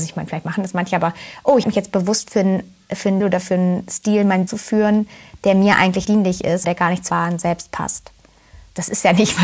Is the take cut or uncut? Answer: cut